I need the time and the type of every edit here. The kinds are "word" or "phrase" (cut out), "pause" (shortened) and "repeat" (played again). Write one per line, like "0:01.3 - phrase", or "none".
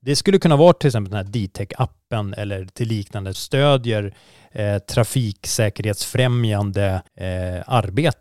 0:03.3 - word
0:07.1 - pause